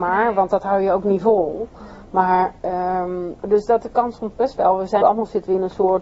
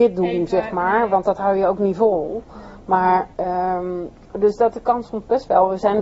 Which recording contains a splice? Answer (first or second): first